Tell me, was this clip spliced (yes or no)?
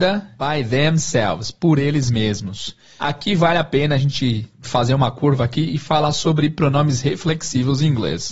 no